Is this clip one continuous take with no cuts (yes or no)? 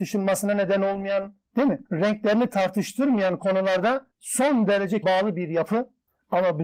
no